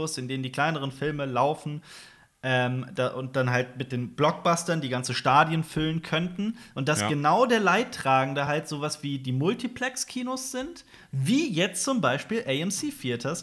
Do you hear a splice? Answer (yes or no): no